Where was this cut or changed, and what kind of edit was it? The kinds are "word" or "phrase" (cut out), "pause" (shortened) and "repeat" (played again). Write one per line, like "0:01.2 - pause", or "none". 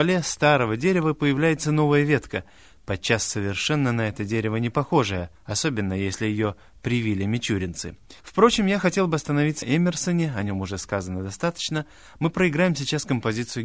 0:05.3 - pause
0:08.2 - pause
0:09.6 - phrase